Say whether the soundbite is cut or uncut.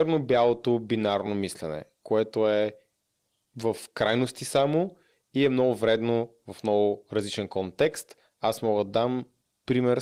uncut